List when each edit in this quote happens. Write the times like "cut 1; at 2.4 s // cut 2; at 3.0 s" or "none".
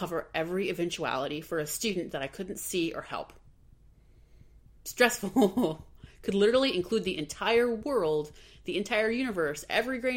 none